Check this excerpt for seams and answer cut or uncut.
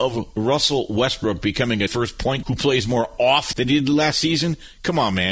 cut